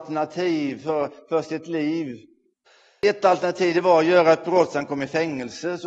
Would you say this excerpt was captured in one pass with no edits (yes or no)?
yes